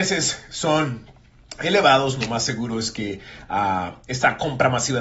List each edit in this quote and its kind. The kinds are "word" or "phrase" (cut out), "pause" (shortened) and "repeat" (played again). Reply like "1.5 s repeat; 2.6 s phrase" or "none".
none